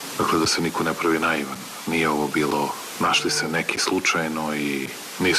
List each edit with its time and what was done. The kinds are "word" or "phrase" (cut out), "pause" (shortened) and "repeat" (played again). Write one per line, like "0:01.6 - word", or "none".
none